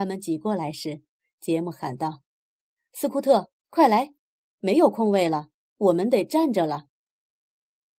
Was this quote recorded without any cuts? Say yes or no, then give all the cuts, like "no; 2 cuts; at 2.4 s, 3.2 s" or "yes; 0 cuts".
yes; 0 cuts